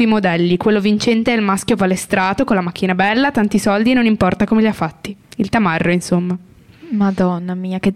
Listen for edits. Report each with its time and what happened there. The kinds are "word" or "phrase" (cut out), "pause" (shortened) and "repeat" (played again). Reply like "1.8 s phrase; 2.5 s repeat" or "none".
none